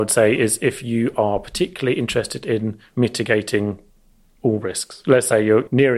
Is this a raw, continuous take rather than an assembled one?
yes; 0 cuts

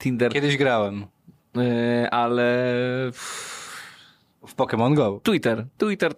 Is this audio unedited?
yes; 0 cuts

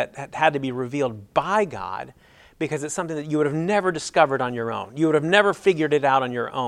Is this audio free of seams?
yes; 0 cuts

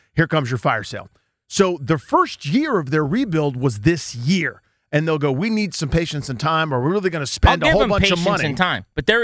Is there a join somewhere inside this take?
no; 0 cuts

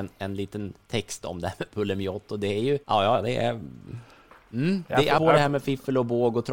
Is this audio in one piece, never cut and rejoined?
no; 2 cuts; at 2.8 s, 5.2 s

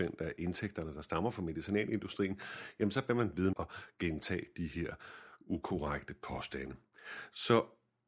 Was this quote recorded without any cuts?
no; 1 cut; at 3.5 s

